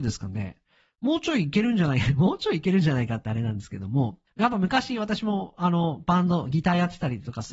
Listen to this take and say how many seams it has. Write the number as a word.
one